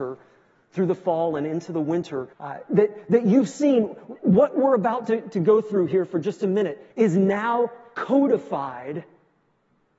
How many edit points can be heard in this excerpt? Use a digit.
2